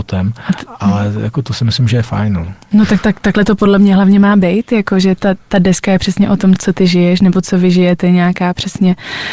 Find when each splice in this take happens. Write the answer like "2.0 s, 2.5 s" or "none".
6.6 s